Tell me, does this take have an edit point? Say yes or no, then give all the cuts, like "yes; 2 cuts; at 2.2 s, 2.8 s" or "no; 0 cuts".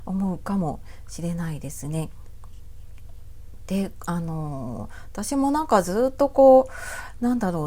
no; 0 cuts